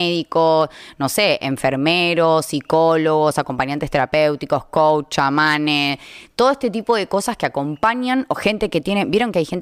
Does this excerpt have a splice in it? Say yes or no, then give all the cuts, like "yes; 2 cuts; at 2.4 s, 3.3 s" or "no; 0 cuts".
no; 0 cuts